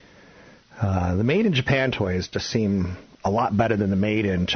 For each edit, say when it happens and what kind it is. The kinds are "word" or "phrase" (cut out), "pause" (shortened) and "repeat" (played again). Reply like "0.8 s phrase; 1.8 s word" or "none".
none